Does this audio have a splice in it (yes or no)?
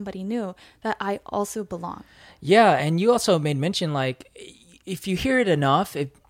no